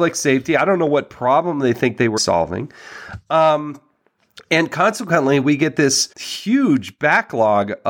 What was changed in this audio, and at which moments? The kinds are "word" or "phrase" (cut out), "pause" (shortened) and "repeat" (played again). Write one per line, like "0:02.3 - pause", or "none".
0:02.2 - word
0:06.1 - pause

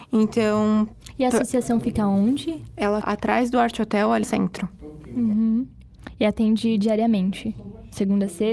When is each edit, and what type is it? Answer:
0:03.0 - word
0:04.2 - word

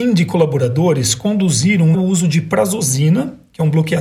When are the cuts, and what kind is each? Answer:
0:01.9 - phrase

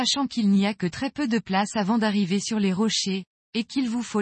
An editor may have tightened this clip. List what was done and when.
none

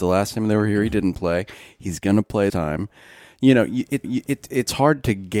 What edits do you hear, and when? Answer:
0:02.5 - word
0:04.0 - repeat

